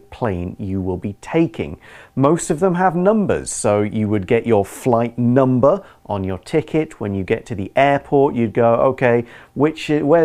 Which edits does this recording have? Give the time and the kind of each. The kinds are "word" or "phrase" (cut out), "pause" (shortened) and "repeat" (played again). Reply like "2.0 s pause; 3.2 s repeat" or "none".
none